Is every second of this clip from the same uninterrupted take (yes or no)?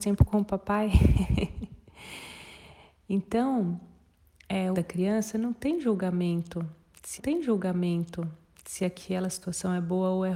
no